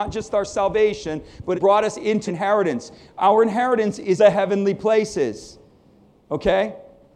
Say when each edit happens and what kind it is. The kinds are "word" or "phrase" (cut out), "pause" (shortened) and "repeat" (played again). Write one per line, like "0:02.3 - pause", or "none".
0:01.5 - word
0:02.3 - word
0:04.2 - word